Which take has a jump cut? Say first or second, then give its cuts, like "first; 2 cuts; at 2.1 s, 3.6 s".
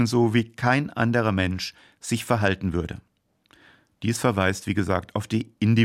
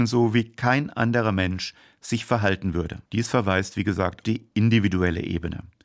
second; 2 cuts; at 3.1 s, 4.2 s